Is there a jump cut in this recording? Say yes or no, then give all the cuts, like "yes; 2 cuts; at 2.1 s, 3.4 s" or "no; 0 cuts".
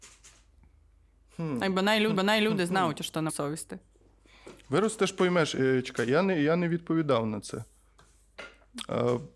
yes; 2 cuts; at 2.2 s, 3.3 s